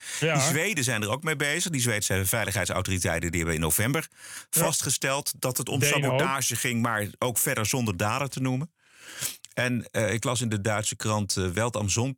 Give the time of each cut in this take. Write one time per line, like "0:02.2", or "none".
none

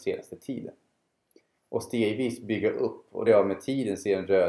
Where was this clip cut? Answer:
0:03.3

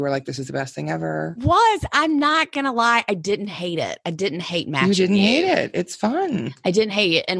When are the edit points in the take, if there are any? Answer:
none

